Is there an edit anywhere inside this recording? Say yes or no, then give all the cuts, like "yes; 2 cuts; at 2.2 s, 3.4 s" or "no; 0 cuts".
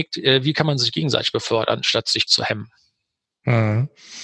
yes; 1 cut; at 2.3 s